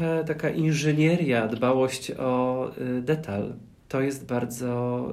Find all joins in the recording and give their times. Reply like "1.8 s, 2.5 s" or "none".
none